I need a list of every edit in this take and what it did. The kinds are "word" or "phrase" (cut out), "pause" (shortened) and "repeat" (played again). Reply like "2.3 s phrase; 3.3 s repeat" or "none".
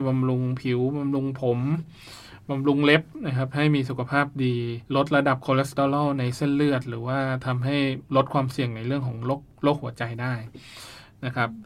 4.9 s pause; 8.1 s pause